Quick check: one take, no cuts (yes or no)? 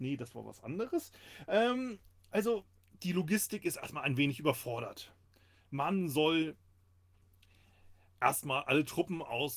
yes